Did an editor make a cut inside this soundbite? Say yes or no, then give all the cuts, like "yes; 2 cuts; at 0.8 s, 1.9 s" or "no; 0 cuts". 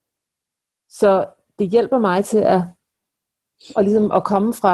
no; 0 cuts